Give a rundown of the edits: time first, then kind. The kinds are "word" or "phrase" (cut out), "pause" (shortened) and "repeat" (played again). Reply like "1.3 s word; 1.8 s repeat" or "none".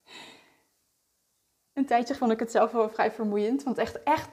2.2 s word